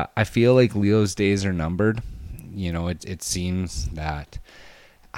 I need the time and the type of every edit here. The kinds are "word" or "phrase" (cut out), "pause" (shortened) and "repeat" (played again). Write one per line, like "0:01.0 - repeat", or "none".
0:03.0 - word